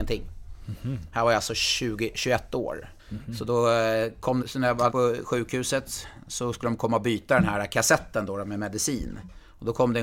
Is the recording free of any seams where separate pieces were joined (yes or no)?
no